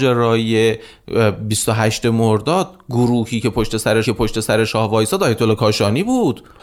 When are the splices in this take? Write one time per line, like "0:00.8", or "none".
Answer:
0:04.0